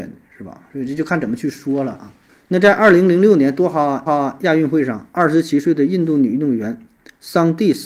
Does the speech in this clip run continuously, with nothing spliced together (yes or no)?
no